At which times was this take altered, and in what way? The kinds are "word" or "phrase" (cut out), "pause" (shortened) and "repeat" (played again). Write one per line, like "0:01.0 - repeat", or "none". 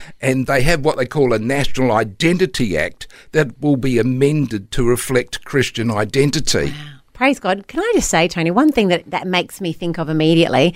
none